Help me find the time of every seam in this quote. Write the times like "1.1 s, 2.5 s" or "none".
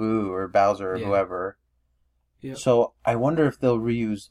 none

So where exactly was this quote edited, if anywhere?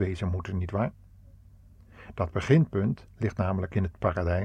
3.1 s

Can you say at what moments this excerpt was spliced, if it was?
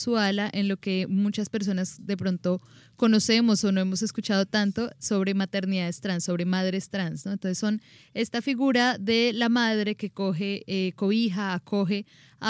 none

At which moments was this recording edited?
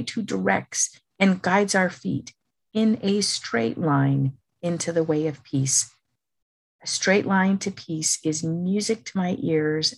none

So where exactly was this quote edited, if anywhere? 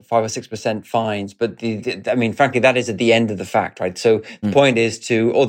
1.8 s, 4.4 s

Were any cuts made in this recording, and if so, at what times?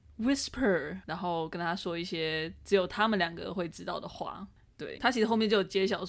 1.0 s, 5.0 s

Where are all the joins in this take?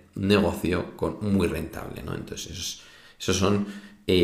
none

